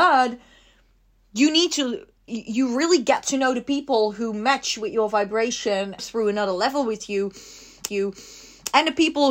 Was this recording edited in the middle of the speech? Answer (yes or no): yes